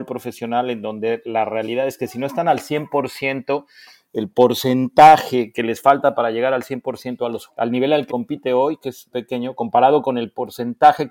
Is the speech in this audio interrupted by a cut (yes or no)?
yes